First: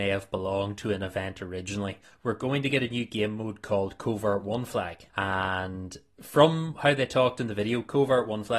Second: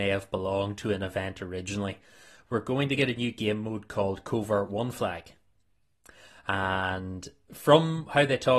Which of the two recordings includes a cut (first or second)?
first